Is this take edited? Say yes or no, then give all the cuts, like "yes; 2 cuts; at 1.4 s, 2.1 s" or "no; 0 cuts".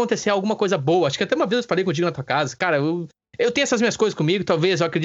no; 0 cuts